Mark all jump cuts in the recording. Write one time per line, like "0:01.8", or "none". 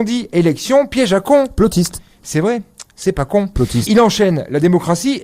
0:03.9